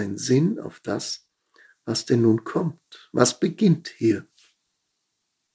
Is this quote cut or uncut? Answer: uncut